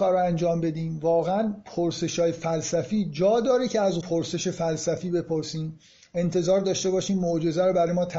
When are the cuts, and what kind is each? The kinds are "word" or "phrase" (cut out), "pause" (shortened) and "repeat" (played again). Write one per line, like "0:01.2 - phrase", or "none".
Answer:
0:04.0 - word